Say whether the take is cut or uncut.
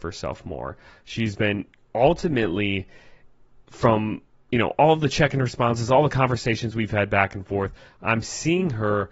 uncut